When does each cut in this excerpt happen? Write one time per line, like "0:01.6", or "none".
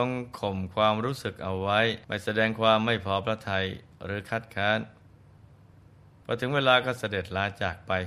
0:02.0